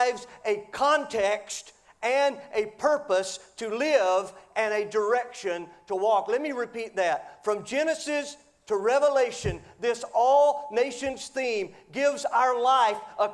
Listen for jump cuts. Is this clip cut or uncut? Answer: uncut